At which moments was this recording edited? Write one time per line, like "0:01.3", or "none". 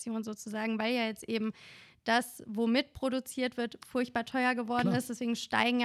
none